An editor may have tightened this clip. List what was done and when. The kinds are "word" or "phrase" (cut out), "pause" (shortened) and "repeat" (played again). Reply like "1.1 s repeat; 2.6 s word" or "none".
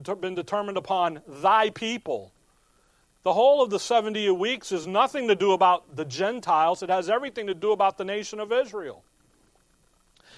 none